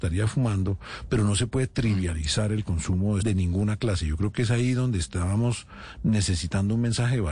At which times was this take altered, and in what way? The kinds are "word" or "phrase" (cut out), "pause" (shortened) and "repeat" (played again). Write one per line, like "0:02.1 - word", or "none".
0:03.2 - word